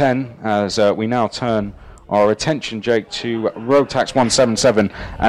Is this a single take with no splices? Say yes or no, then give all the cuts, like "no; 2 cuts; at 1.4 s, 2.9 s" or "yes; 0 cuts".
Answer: yes; 0 cuts